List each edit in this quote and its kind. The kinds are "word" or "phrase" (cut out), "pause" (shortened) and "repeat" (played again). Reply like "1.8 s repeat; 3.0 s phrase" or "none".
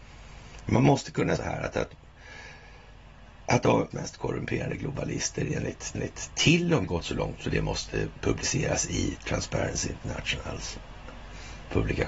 1.4 s phrase; 3.9 s word; 5.9 s repeat; 6.8 s phrase